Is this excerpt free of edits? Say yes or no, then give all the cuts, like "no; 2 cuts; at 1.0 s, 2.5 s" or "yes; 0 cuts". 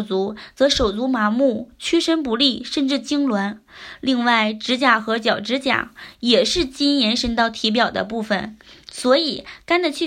yes; 0 cuts